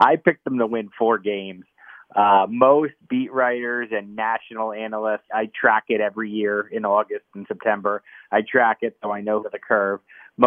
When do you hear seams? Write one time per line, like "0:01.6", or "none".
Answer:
0:05.3
0:09.4

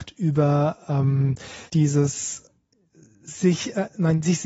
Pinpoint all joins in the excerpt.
0:01.7

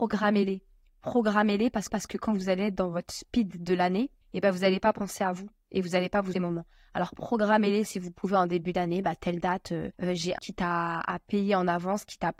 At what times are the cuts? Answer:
0:01.9
0:04.2
0:06.3
0:09.9
0:10.4

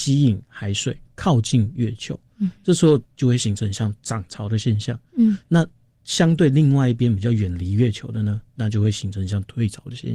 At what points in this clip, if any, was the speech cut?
0:01.0
0:08.5

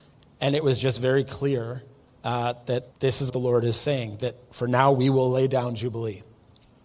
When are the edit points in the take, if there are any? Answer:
0:02.1
0:02.9
0:03.3

